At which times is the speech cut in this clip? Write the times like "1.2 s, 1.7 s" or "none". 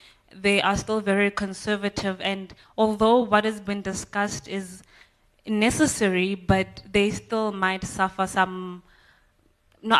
none